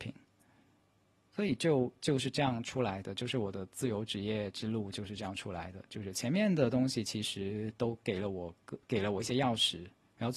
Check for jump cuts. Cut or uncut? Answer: cut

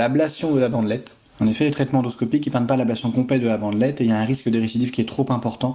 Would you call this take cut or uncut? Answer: uncut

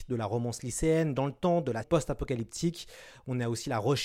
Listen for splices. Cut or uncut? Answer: cut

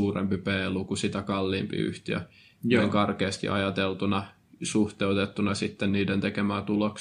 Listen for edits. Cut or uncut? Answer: uncut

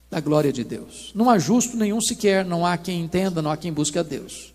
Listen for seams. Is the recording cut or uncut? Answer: uncut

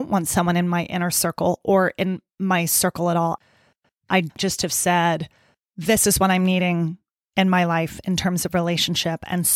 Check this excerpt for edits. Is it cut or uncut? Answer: uncut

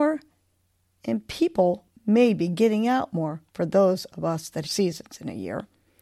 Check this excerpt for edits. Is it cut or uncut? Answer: cut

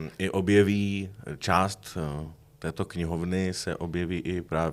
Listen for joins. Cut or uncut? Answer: uncut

